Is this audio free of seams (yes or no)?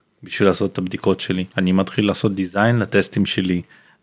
no